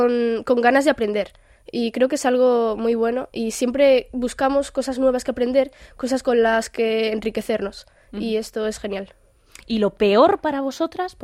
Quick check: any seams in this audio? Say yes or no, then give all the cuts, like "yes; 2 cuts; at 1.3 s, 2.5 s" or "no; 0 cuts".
no; 0 cuts